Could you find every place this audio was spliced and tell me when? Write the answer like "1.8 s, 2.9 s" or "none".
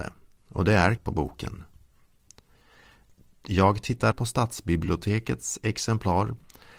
1.0 s, 4.1 s